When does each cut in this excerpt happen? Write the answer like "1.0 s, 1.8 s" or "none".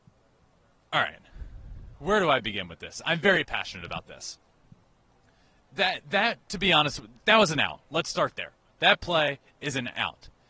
8.6 s